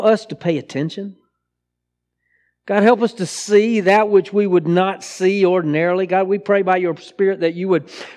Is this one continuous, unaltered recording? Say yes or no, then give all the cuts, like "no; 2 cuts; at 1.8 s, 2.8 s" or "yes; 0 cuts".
yes; 0 cuts